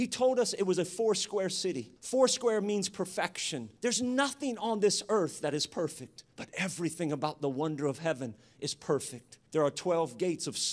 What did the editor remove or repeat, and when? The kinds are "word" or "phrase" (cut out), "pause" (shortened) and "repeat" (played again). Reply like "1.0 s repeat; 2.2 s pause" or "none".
2.0 s pause; 3.8 s pause; 6.3 s pause; 9.5 s pause